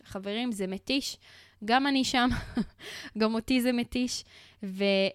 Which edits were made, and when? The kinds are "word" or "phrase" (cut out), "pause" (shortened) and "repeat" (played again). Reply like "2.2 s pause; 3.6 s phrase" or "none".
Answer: none